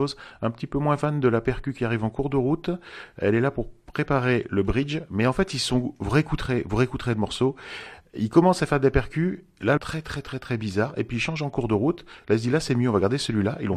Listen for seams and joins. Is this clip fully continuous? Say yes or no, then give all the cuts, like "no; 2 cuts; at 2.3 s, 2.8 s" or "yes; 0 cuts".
no; 1 cut; at 9.8 s